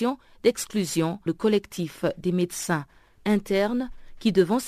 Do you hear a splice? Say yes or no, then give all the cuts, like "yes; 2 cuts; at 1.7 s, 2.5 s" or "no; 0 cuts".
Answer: yes; 1 cut; at 1.3 s